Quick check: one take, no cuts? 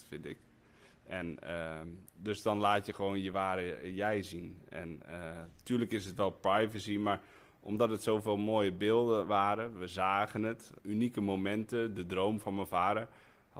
no; 1 cut; at 10.8 s

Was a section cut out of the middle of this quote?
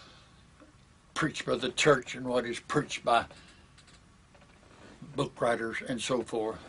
no; 0 cuts

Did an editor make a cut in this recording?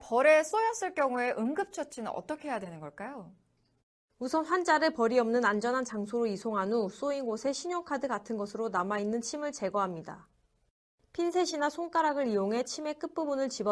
no; 0 cuts

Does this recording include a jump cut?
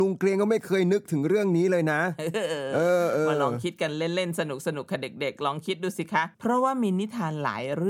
yes; 1 cut; at 6.3 s

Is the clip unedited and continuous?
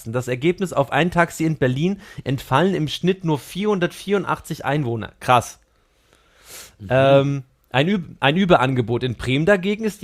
yes; 0 cuts

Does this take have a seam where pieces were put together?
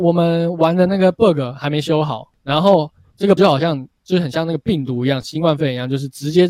yes; 1 cut; at 3.4 s

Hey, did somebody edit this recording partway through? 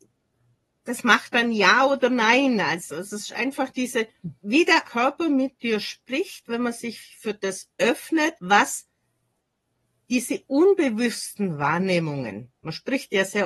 yes; 3 cuts; at 4.4 s, 4.8 s, 8.4 s

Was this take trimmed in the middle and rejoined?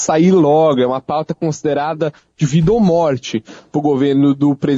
no; 0 cuts

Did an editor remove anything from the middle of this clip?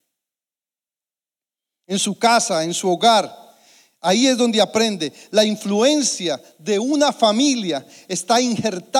no; 0 cuts

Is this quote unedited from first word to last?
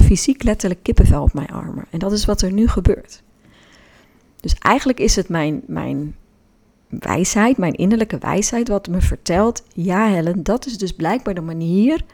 yes; 0 cuts

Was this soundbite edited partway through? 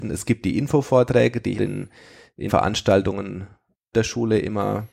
yes; 3 cuts; at 1.6 s, 2.5 s, 3.9 s

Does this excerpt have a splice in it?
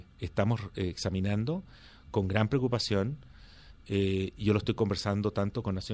no; 0 cuts

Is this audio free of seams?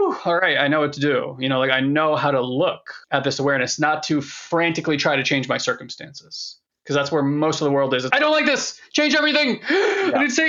no; 2 cuts; at 3.0 s, 8.1 s

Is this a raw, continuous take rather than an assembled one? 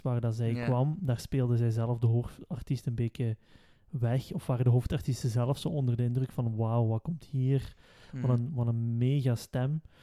yes; 0 cuts

